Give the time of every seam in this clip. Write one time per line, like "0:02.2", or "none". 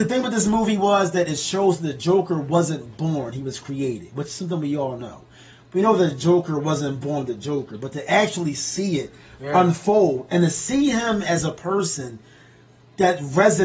none